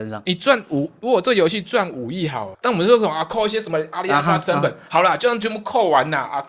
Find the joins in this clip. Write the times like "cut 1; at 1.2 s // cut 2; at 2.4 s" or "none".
cut 1; at 2.5 s

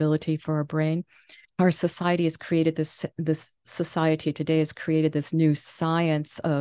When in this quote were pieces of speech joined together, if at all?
cut 1; at 1.4 s

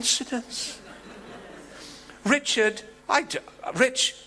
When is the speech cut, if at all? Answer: cut 1; at 3.0 s

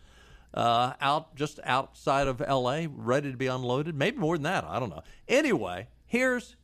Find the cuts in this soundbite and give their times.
none

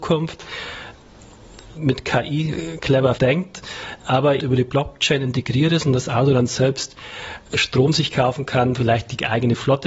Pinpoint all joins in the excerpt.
cut 1; at 1.7 s // cut 2; at 3.1 s // cut 3; at 4.4 s // cut 4; at 7.5 s

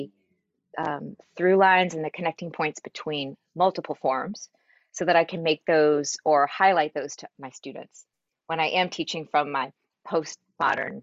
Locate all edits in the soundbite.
none

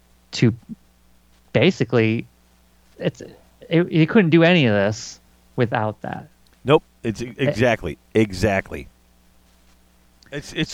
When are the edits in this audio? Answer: cut 1; at 2.9 s

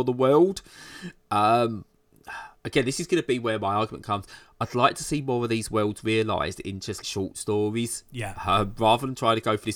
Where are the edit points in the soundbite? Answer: cut 1; at 2.6 s // cut 2; at 7.0 s

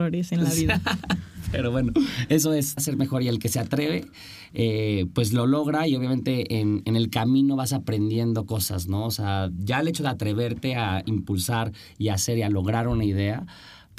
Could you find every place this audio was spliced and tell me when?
cut 1; at 2.8 s

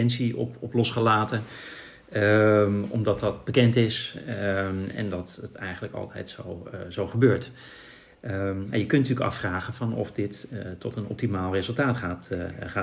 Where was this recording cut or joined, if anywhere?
none

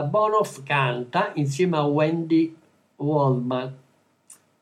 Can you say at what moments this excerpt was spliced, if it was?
none

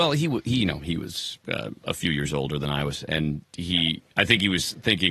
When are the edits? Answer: cut 1; at 1.4 s // cut 2; at 4.1 s

